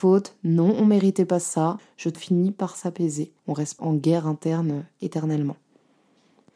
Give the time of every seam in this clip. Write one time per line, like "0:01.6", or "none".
0:02.1
0:03.4
0:03.8